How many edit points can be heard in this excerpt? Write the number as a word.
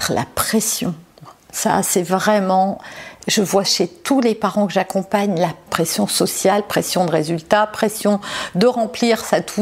two